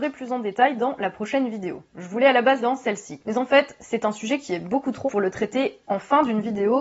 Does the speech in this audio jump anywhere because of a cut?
yes; 2 cuts; at 2.6 s, 5.1 s

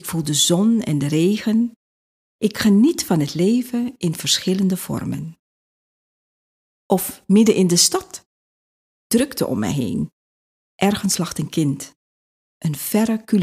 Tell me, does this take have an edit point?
no; 0 cuts

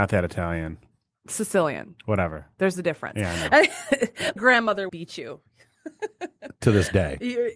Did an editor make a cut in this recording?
yes; 2 cuts; at 4.4 s, 4.9 s

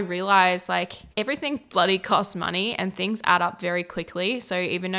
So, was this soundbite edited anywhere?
yes; 1 cut; at 1.1 s

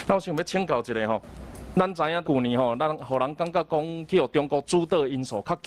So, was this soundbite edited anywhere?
yes; 1 cut; at 2.2 s

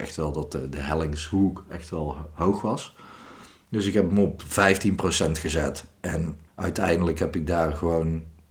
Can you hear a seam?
yes; 1 cut; at 6.5 s

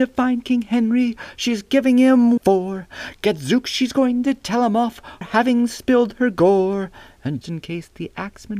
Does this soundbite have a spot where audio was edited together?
yes; 3 cuts; at 2.4 s, 5.2 s, 7.4 s

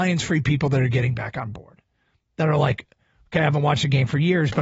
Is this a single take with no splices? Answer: yes; 0 cuts

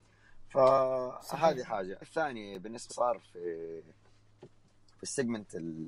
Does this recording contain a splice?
yes; 2 cuts; at 2.0 s, 2.9 s

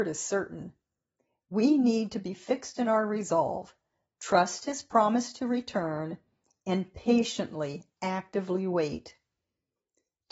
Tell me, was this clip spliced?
no; 0 cuts

